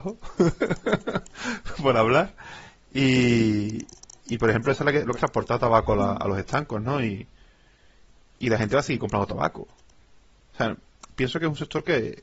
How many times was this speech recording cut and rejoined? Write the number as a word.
one